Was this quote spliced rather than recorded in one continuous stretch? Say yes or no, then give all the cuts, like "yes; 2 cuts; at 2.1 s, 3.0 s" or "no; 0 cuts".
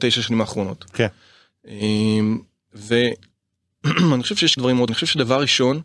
yes; 2 cuts; at 4.6 s, 4.9 s